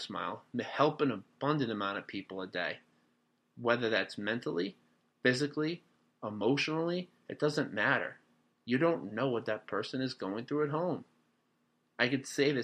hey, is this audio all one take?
yes; 0 cuts

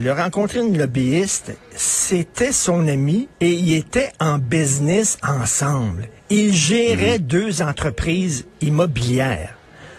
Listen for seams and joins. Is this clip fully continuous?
no; 2 cuts; at 3.3 s, 6.2 s

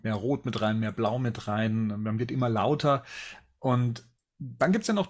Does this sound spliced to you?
no; 0 cuts

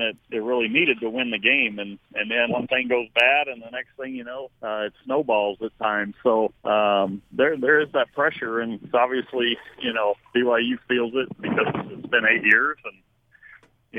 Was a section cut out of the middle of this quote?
yes; 5 cuts; at 1.0 s, 2.5 s, 4.6 s, 6.6 s, 11.4 s

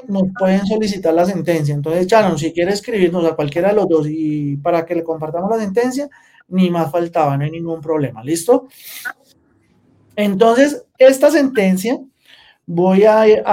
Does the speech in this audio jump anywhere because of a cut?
no; 0 cuts

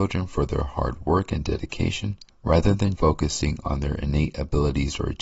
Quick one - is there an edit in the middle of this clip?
yes; 2 cuts; at 2.3 s, 3.0 s

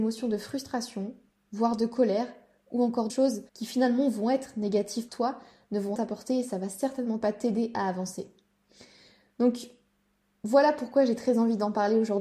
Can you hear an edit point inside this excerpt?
yes; 4 cuts; at 3.1 s, 3.5 s, 5.1 s, 5.9 s

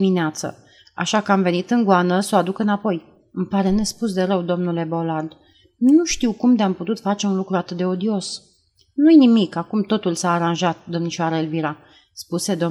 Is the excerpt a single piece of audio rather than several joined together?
yes; 0 cuts

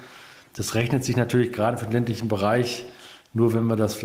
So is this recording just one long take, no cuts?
yes; 0 cuts

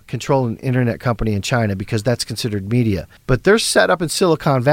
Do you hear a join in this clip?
yes; 1 cut; at 3.2 s

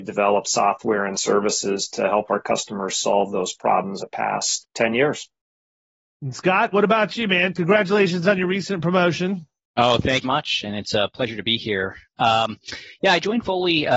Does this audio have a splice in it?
yes; 3 cuts; at 4.0 s, 4.6 s, 10.2 s

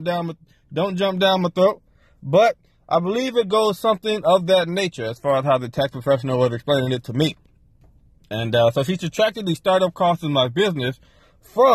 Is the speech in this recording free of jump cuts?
yes; 0 cuts

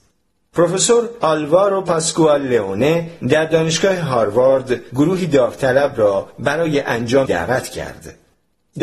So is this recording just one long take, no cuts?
no; 1 cut; at 7.3 s

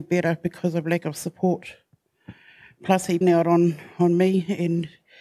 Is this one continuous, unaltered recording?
no; 1 cut; at 3.2 s

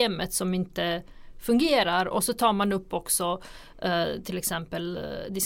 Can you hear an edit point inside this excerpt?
no; 0 cuts

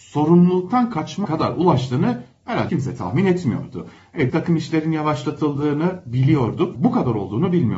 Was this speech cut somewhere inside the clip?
yes; 4 cuts; at 1.2 s, 2.7 s, 4.3 s, 6.7 s

